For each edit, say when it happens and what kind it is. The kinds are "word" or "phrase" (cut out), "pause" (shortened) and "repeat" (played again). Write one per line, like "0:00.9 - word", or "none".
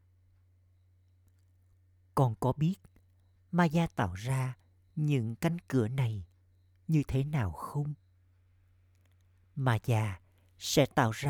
none